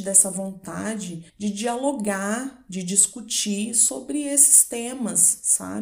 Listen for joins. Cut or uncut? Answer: cut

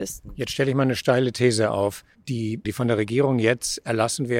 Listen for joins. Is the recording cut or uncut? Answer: cut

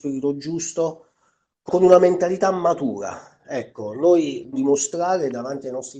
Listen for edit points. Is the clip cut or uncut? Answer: cut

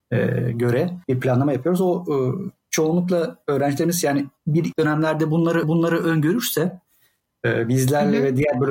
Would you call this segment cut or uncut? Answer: cut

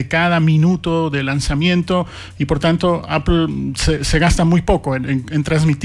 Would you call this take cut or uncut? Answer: uncut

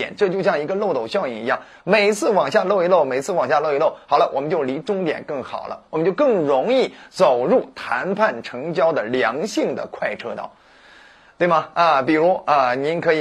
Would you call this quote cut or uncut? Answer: uncut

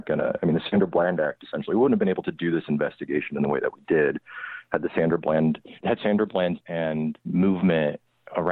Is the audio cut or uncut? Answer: cut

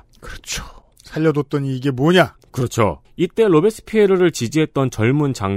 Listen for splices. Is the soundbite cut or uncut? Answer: cut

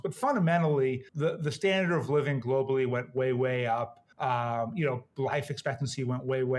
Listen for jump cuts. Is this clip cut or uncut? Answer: cut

